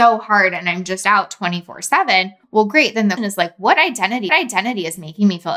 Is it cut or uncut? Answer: cut